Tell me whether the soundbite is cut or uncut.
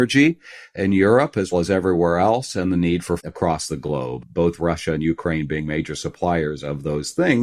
cut